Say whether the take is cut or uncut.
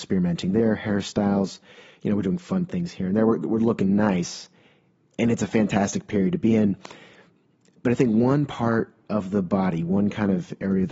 uncut